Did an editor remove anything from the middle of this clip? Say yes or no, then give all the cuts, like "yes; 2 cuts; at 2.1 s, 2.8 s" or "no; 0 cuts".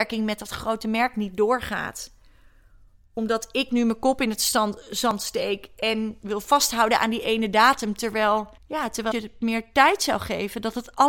yes; 2 cuts; at 8.6 s, 9.1 s